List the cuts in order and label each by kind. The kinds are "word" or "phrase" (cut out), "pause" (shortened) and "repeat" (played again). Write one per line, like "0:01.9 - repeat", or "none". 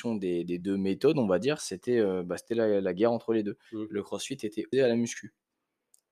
0:03.7 - pause
0:04.7 - word